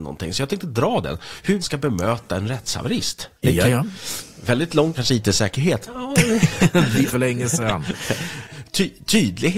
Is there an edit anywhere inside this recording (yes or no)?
yes